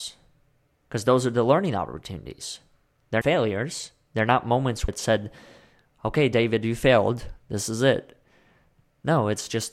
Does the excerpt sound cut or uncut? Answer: cut